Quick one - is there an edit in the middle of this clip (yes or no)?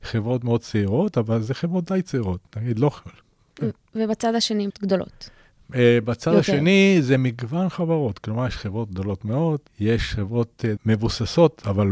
yes